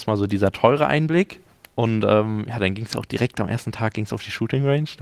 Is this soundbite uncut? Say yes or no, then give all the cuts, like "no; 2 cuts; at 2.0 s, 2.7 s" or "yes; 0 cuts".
no; 1 cut; at 1.5 s